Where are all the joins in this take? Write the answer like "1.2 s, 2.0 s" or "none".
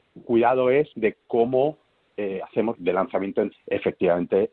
0.9 s, 2.8 s, 3.5 s